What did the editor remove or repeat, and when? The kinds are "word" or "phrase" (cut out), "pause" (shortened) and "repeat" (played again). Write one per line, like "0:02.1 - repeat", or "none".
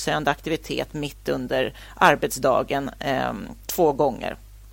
none